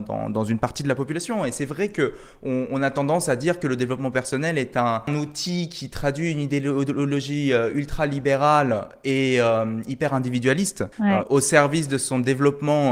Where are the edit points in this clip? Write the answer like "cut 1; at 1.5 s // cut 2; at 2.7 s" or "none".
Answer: cut 1; at 10.9 s

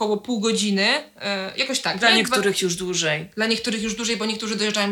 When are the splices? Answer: none

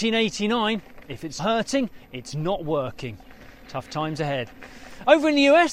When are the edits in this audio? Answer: cut 1; at 1.4 s

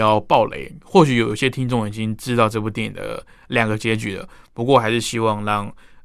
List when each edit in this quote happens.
none

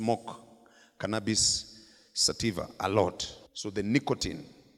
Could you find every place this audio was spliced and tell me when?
cut 1; at 3.5 s

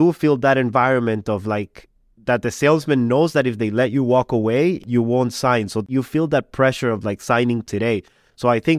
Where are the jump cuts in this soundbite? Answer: none

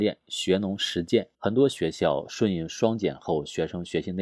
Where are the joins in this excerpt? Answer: cut 1; at 1.3 s

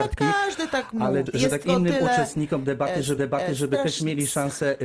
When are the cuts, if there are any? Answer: cut 1; at 1.3 s // cut 2; at 1.6 s // cut 3; at 3.2 s

